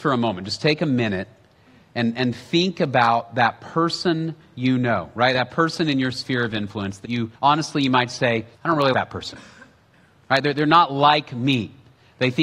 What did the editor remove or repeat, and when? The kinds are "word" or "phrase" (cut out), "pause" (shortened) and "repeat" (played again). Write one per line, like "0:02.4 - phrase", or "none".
0:07.0 - word
0:07.3 - pause
0:08.5 - pause
0:08.9 - word